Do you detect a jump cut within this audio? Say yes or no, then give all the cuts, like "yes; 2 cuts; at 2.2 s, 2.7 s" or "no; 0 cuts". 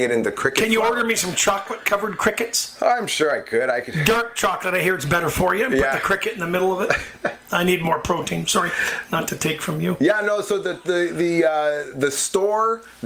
no; 0 cuts